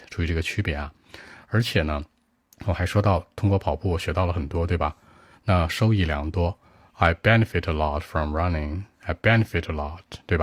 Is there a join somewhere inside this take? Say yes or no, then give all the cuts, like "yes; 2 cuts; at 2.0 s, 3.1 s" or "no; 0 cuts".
no; 0 cuts